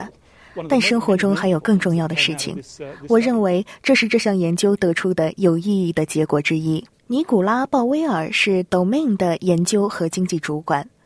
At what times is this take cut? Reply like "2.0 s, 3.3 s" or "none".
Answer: 7.0 s

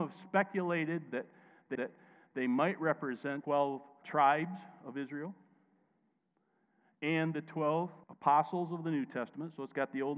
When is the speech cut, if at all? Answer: 1.8 s, 3.4 s, 4.0 s, 8.0 s

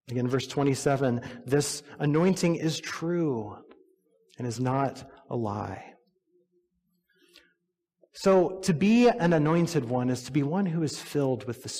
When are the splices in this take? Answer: none

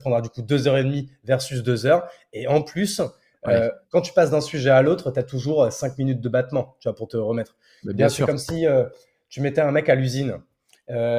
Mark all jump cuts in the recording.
none

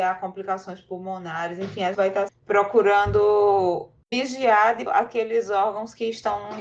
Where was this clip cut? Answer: 1.9 s, 2.3 s, 4.9 s

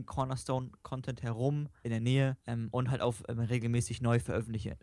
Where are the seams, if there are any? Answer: 1.8 s, 2.4 s

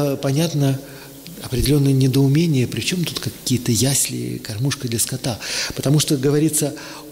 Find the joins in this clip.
none

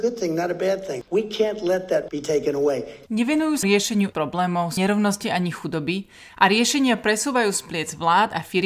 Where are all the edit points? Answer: 2.1 s, 3.6 s, 4.1 s, 4.8 s

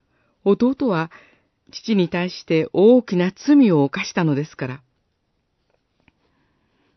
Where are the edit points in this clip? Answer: none

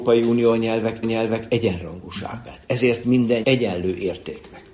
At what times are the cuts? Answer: 1.0 s, 3.0 s, 3.4 s

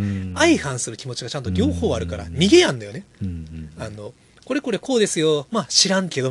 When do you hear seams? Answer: none

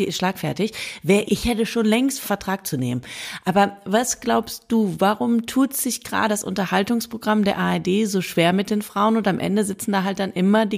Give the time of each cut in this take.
1.3 s, 2.2 s, 6.3 s

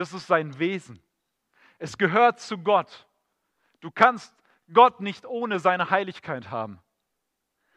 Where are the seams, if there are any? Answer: none

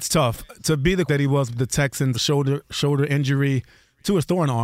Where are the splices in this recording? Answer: 1.1 s, 2.1 s

